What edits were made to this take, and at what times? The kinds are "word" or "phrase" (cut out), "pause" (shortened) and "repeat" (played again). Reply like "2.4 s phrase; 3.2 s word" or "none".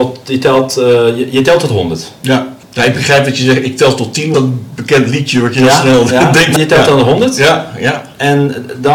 2.6 s pause; 4.3 s phrase; 6.6 s word